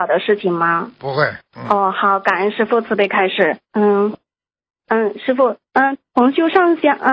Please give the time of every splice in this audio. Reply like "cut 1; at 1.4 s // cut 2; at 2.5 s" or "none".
cut 1; at 1.4 s // cut 2; at 3.6 s // cut 3; at 5.7 s